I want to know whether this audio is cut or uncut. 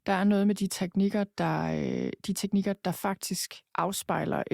uncut